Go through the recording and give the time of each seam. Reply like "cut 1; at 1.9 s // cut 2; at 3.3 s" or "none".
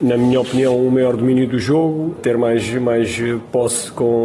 cut 1; at 2.2 s

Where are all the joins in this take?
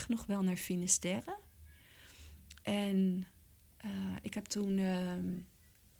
none

